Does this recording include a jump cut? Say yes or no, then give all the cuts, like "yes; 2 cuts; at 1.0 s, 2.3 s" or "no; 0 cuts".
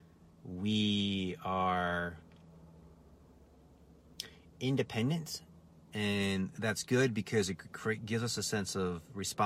no; 0 cuts